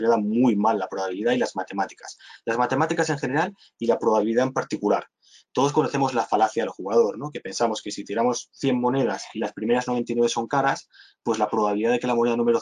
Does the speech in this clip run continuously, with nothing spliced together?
yes; 0 cuts

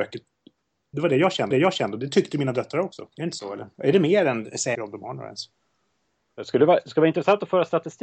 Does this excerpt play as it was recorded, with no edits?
no; 3 cuts; at 1.5 s, 3.1 s, 4.7 s

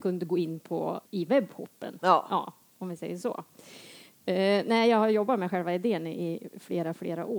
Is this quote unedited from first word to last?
no; 1 cut; at 1.0 s

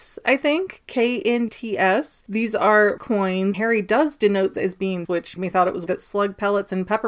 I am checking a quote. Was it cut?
yes; 7 cuts; at 1.5 s, 3.0 s, 3.5 s, 4.5 s, 5.0 s, 5.4 s, 5.9 s

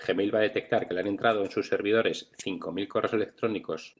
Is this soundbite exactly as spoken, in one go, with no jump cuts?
yes; 0 cuts

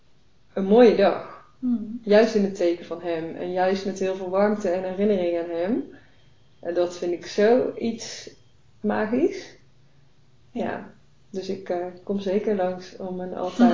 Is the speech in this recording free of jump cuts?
yes; 0 cuts

